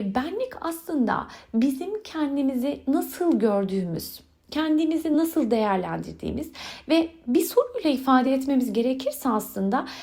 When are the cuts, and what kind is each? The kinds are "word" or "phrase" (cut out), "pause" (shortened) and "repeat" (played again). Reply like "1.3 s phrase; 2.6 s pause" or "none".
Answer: none